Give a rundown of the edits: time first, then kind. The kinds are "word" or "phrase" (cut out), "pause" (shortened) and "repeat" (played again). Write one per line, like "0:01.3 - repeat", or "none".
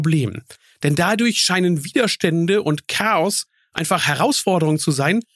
none